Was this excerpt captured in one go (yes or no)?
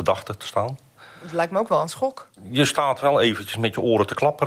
yes